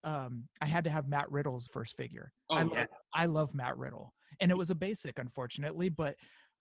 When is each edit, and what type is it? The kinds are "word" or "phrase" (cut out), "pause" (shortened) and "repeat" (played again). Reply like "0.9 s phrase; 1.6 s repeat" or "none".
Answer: 1.7 s word